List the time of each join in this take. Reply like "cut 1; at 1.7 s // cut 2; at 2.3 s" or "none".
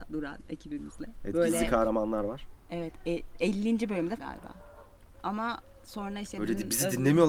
cut 1; at 4.2 s